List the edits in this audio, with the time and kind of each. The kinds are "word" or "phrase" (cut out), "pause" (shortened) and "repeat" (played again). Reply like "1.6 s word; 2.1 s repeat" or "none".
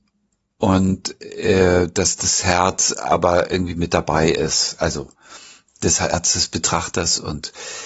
none